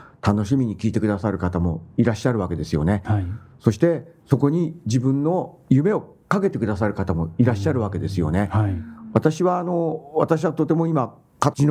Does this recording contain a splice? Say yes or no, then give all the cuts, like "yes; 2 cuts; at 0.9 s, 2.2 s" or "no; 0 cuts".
yes; 1 cut; at 4.2 s